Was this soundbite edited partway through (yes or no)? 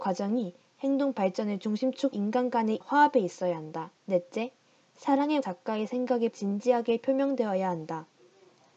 yes